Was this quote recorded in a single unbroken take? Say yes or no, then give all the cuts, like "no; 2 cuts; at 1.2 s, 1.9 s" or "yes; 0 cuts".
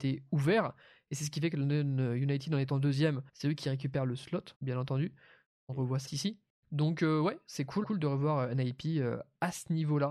no; 5 cuts; at 3.3 s, 4.5 s, 6.1 s, 6.5 s, 7.8 s